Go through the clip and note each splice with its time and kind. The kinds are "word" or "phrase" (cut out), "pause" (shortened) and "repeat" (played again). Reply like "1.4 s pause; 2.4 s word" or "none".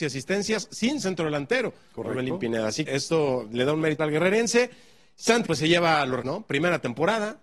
1.0 s word; 2.9 s word; 4.0 s word; 5.4 s word; 6.2 s word

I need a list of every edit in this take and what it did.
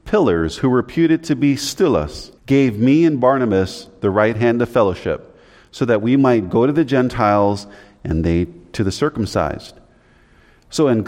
2.4 s pause

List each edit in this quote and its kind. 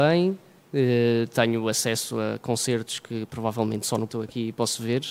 4.1 s word

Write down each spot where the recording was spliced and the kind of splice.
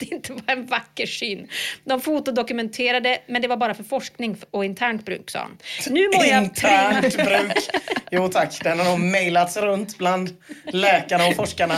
none

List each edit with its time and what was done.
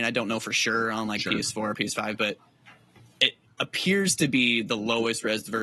none

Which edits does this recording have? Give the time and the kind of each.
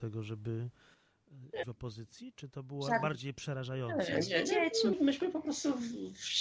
1.6 s word; 2.3 s word; 4.9 s word

